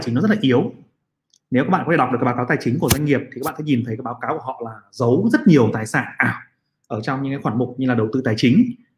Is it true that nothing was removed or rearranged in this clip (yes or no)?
yes